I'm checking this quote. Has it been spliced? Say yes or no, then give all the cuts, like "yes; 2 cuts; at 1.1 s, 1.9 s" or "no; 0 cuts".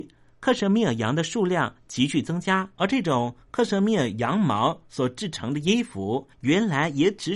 yes; 2 cuts; at 2.7 s, 6.3 s